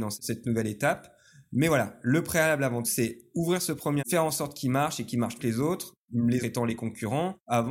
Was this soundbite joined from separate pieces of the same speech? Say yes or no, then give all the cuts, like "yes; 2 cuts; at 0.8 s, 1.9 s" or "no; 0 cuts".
yes; 4 cuts; at 2.8 s, 4.0 s, 5.4 s, 6.4 s